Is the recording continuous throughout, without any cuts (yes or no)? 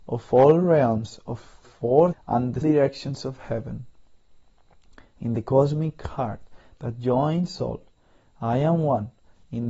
no